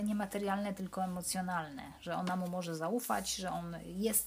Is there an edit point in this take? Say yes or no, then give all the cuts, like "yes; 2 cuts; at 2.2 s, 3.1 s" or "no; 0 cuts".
no; 0 cuts